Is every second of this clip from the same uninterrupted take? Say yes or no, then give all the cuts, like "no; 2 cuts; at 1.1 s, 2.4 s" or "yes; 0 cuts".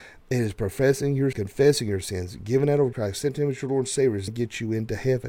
no; 3 cuts; at 1.3 s, 2.9 s, 4.3 s